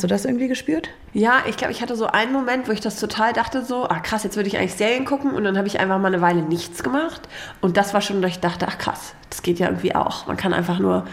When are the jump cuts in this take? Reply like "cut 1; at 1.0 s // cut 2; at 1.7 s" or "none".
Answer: none